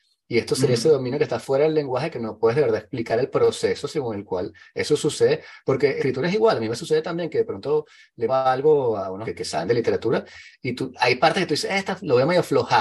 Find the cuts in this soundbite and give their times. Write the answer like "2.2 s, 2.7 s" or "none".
6.0 s, 8.3 s, 9.2 s